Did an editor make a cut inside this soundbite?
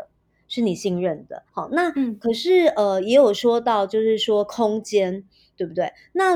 yes; 1 cut; at 1.5 s

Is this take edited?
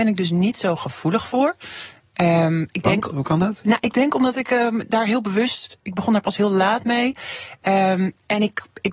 no; 0 cuts

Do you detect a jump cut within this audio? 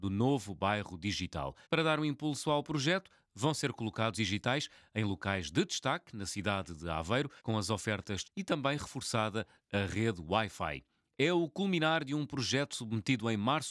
yes; 4 cuts; at 1.6 s, 4.1 s, 7.4 s, 8.2 s

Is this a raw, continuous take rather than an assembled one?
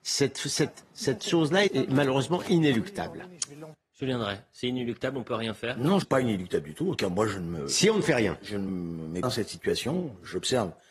no; 5 cuts; at 1.7 s, 6.0 s, 7.0 s, 8.7 s, 9.2 s

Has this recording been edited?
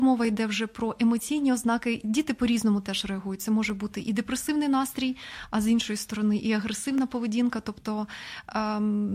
no; 0 cuts

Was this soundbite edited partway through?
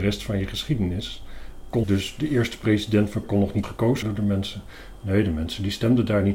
yes; 4 cuts; at 1.8 s, 3.2 s, 3.6 s, 4.0 s

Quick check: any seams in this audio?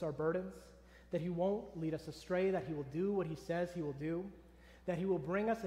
no; 0 cuts

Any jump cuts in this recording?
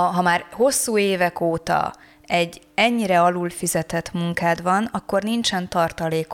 no; 0 cuts

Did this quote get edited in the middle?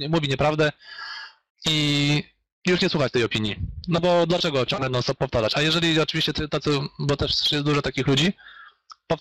yes; 1 cut; at 1.5 s

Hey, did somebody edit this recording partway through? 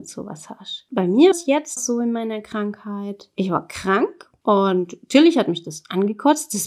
yes; 2 cuts; at 1.3 s, 1.8 s

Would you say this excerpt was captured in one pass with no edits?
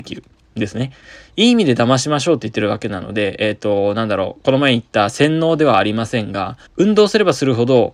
no; 1 cut; at 6.7 s

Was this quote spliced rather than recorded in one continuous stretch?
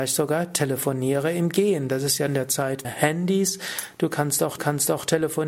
yes; 3 cuts; at 2.3 s, 2.8 s, 4.6 s

